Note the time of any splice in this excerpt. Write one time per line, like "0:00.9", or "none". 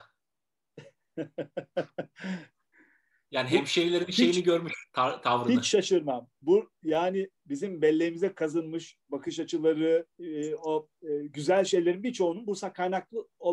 0:04.9
0:07.4
0:09.0
0:10.1